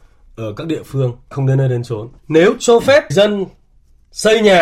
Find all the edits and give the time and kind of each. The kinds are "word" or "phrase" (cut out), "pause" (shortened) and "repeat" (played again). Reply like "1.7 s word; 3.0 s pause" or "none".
1.3 s word; 2.2 s pause; 3.1 s word